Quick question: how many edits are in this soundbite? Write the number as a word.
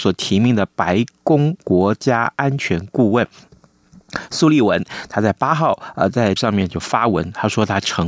one